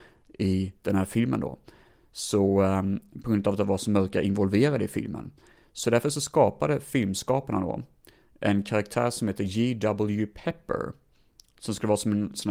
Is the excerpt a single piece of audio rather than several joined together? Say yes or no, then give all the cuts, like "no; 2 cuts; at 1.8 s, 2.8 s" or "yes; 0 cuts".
yes; 0 cuts